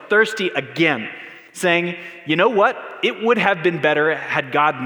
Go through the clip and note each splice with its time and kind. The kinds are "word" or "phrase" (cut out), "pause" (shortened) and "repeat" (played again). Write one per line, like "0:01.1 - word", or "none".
0:01.5 - pause